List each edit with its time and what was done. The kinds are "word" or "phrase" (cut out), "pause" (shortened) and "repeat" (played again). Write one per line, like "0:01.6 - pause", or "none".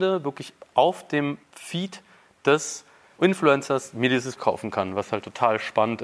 0:01.4 - pause
0:03.2 - word
0:04.4 - word